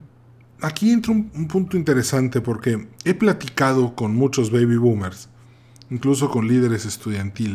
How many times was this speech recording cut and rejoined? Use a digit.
0